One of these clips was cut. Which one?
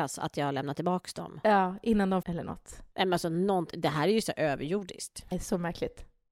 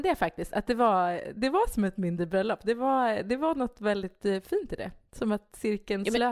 first; 2 cuts; at 2.2 s, 5.3 s

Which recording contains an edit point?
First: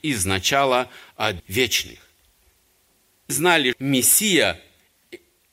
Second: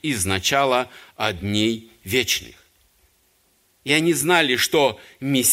first; 3 cuts; at 1.4 s, 3.3 s, 3.7 s

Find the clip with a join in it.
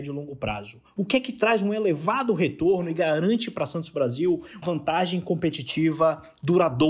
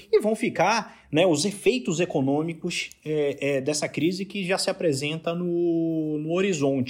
first; 2 cuts; at 1.0 s, 4.6 s

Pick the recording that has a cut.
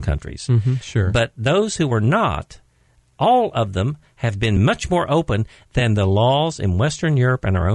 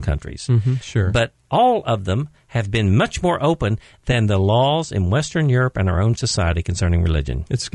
second; 1 cut; at 1.3 s

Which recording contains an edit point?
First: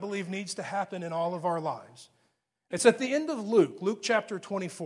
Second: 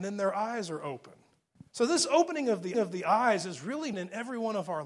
second; 3 cuts; at 1.7 s, 2.7 s, 3.9 s

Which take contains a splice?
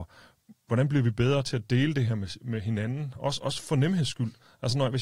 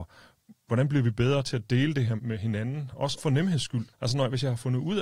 second; 3 cuts; at 2.2 s, 3.2 s, 3.9 s

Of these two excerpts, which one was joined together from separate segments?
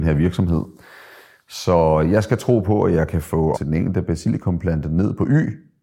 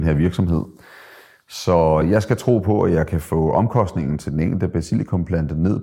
first; 1 cut; at 3.5 s

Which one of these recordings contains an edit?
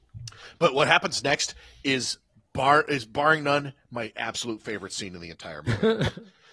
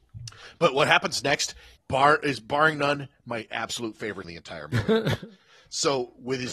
second; 2 cuts; at 1.8 s, 4.2 s

